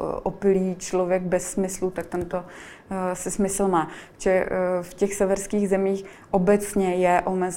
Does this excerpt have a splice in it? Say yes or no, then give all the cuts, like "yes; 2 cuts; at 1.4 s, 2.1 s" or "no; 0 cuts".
no; 0 cuts